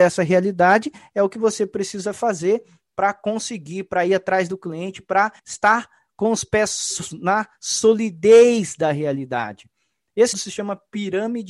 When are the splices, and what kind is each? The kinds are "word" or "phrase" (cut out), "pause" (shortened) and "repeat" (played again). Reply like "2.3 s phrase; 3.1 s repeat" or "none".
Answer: 5.4 s pause; 7.1 s word; 10.3 s word